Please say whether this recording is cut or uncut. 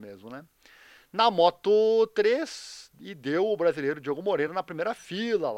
uncut